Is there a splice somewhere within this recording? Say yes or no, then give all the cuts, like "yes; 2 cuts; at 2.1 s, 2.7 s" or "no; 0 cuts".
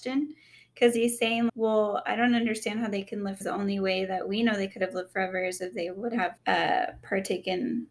yes; 3 cuts; at 1.5 s, 3.4 s, 6.4 s